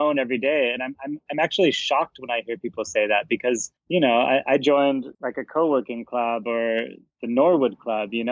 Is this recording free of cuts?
no; 2 cuts; at 3.8 s, 5.1 s

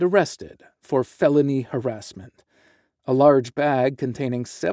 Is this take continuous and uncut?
yes; 0 cuts

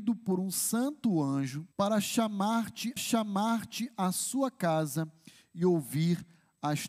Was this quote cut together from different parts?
yes; 2 cuts; at 1.7 s, 3.0 s

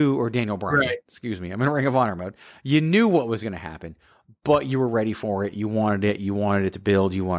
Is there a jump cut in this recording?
no; 0 cuts

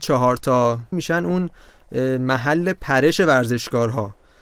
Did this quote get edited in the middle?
yes; 1 cut; at 0.9 s

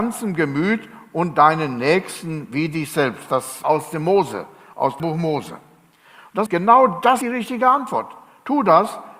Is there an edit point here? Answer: yes; 4 cuts; at 3.6 s, 5.0 s, 6.5 s, 7.2 s

